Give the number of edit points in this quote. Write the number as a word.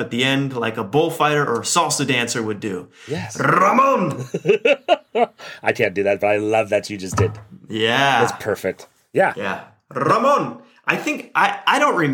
zero